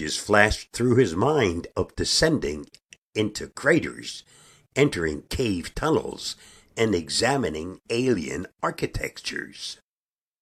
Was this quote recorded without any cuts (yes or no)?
yes